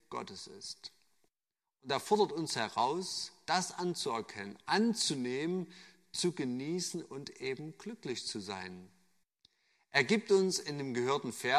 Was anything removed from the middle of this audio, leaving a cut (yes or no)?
no